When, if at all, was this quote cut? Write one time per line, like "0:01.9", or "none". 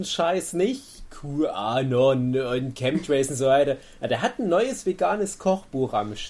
none